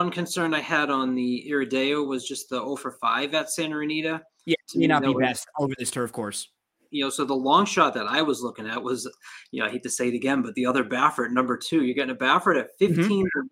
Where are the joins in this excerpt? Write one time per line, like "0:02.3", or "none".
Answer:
none